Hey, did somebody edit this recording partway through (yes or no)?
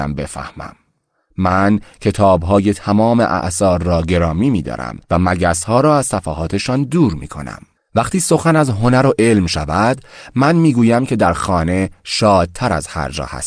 yes